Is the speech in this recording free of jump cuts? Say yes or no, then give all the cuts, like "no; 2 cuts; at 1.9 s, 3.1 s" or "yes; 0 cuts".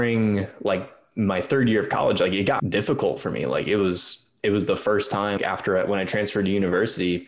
no; 2 cuts; at 2.6 s, 5.4 s